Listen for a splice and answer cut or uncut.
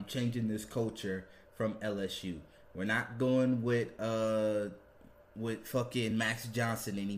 uncut